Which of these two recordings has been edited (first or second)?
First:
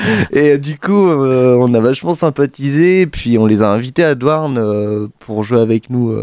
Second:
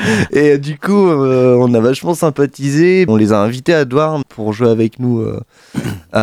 second